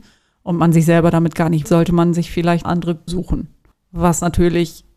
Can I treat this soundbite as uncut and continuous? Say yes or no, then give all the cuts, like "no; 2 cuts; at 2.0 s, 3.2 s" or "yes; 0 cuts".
no; 4 cuts; at 1.6 s, 2.6 s, 3.1 s, 3.7 s